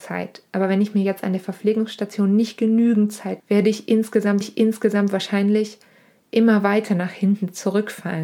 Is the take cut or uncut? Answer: cut